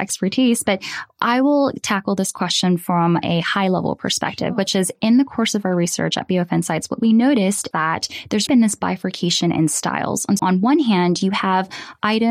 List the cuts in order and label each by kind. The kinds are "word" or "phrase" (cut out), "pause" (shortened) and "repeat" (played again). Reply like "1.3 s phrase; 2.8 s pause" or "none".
7.7 s word; 8.5 s word; 10.4 s word